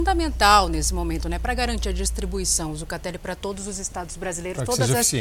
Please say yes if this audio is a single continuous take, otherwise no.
yes